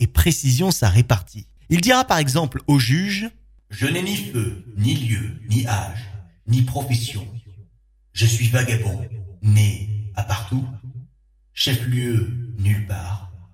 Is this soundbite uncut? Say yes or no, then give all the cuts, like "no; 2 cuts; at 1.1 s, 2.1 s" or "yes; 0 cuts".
yes; 0 cuts